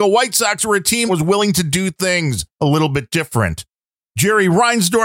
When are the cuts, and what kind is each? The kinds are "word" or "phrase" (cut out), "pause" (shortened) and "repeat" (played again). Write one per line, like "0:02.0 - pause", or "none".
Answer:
0:01.1 - word
0:02.5 - pause